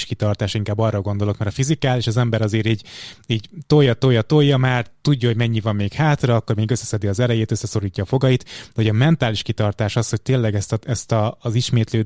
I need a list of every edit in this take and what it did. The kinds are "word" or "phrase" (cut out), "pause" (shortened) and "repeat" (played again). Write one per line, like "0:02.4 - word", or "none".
none